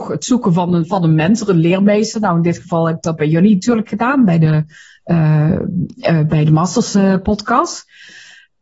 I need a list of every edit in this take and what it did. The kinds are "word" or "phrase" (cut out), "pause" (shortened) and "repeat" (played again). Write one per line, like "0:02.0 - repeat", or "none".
none